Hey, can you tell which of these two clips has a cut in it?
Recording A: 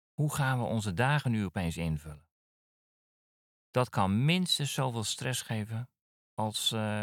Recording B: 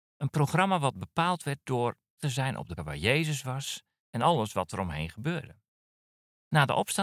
B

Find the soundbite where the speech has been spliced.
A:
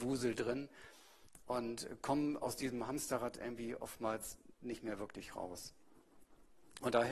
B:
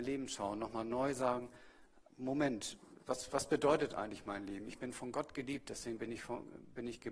B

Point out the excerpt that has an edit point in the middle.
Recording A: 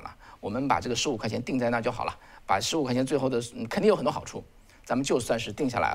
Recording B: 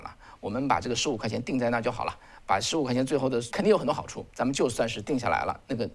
B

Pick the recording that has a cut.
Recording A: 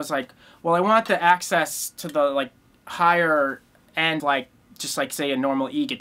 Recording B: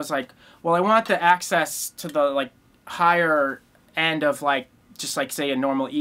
A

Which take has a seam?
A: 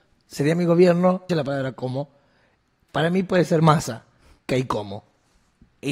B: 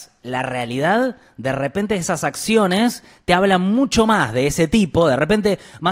A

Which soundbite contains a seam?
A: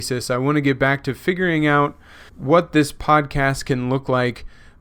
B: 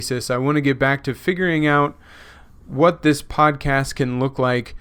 A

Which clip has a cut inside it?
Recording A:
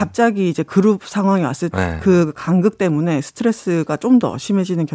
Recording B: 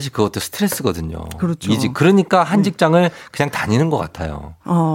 A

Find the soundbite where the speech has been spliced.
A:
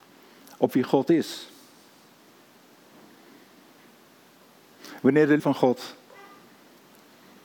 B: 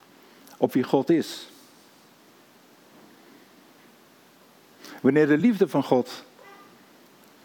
A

